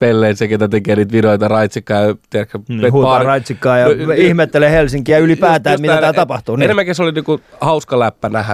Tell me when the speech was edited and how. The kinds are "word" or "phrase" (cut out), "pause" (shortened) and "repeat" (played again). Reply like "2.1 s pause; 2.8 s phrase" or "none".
none